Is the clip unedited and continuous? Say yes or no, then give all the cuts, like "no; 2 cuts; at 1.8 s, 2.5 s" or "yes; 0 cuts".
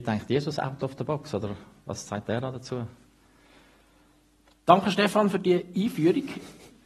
yes; 0 cuts